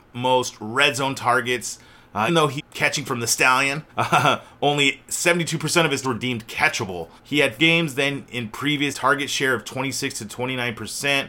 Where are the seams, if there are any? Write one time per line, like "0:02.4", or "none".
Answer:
0:02.3
0:02.6
0:03.1
0:03.9
0:06.0
0:07.2
0:07.6
0:08.9